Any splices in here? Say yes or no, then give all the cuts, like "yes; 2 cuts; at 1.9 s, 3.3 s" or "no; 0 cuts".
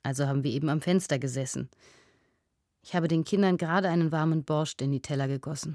no; 0 cuts